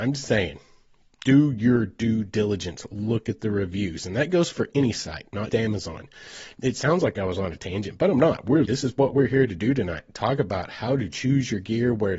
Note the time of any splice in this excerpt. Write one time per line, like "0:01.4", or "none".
0:05.5
0:08.6